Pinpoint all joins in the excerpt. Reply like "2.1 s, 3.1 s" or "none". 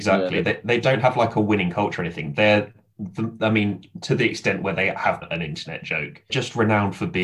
5.2 s, 6.3 s